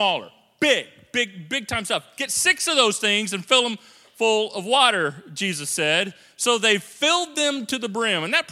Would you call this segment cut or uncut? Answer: uncut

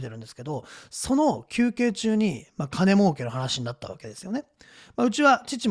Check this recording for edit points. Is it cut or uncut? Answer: uncut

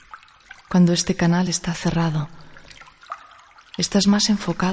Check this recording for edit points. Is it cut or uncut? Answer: uncut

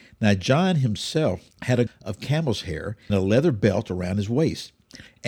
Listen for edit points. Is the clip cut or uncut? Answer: cut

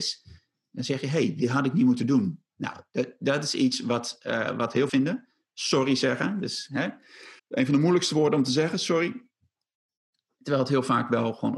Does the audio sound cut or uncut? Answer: cut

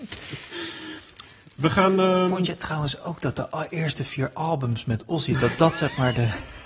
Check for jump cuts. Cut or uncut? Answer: uncut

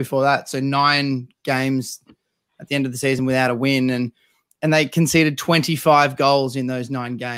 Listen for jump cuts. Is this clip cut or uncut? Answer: uncut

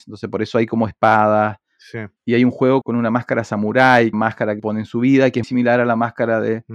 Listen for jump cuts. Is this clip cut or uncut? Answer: cut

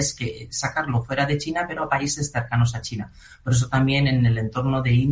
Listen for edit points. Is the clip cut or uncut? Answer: uncut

